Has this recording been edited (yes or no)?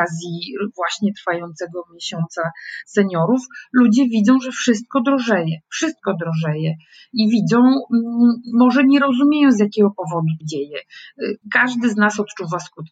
yes